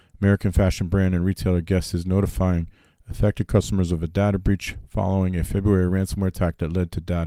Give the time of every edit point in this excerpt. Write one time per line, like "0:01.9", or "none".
none